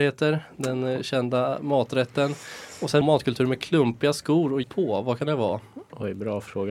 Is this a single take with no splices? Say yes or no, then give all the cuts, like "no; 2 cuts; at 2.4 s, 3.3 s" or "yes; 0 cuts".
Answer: no; 2 cuts; at 3.0 s, 4.6 s